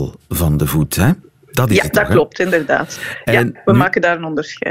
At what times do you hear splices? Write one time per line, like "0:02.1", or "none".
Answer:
0:01.2